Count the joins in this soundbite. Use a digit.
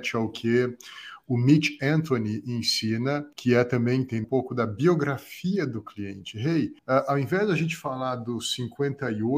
3